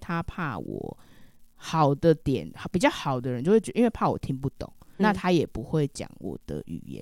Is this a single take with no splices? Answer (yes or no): no